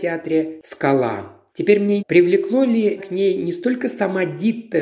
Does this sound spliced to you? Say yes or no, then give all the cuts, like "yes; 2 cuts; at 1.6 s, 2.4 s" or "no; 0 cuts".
yes; 3 cuts; at 1.5 s, 2.0 s, 3.0 s